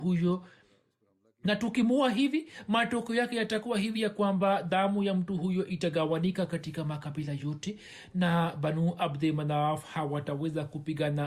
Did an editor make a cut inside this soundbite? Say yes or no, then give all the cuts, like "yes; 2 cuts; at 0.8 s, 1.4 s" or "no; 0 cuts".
no; 0 cuts